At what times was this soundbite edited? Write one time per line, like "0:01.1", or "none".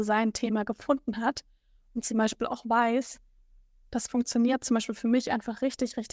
none